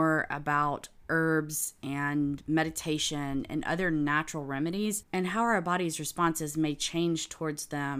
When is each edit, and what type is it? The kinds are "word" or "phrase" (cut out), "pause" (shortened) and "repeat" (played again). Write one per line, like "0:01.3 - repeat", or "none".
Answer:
none